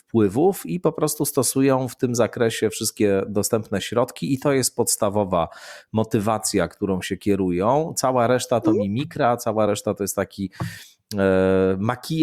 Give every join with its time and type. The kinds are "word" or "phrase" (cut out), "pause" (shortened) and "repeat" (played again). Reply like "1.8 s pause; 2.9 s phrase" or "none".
none

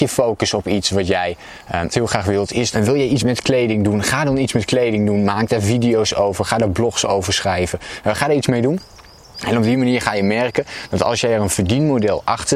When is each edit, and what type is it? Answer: 1.9 s word; 2.7 s word; 3.2 s word

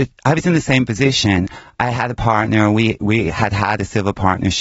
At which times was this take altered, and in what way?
none

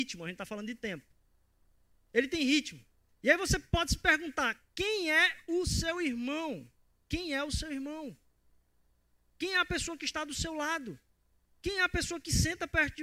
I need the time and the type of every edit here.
none

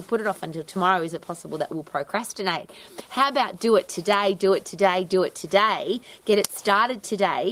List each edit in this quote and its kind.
none

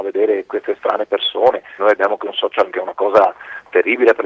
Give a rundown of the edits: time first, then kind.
1.8 s word; 2.7 s word

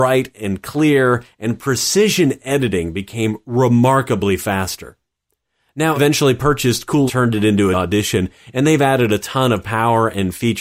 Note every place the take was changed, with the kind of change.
6.0 s word; 7.1 s phrase; 7.7 s word

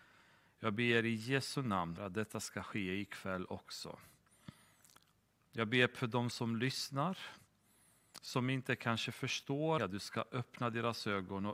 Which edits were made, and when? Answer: 2.0 s word; 9.8 s word

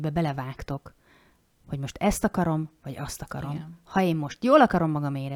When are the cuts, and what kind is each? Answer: none

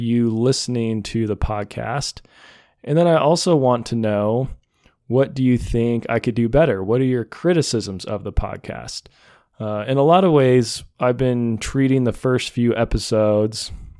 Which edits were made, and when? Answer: none

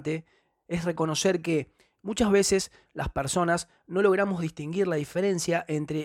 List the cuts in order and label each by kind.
none

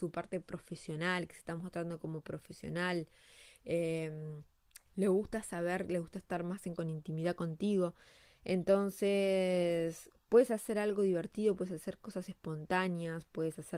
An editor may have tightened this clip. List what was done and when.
4.9 s word; 6.8 s word

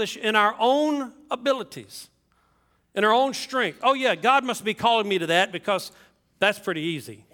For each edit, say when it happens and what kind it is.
none

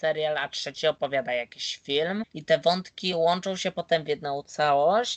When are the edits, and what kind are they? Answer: none

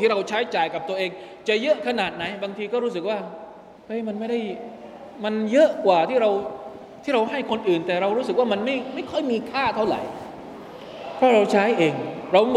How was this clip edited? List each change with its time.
3.8 s pause

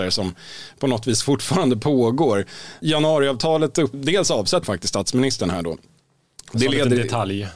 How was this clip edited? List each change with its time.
3.9 s word; 4.6 s word

